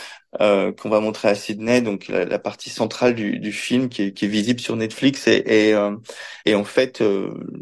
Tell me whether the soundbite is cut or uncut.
cut